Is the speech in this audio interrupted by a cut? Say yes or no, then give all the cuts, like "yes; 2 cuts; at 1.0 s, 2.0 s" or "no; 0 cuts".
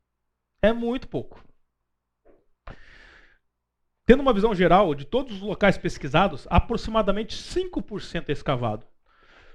no; 0 cuts